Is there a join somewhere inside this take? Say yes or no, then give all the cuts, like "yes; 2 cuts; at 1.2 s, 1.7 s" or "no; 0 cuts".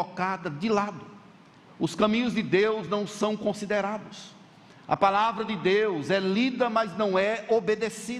no; 0 cuts